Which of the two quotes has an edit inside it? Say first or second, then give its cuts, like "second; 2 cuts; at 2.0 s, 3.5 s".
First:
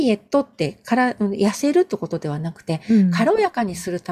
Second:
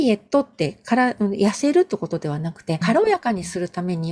second; 1 cut; at 2.8 s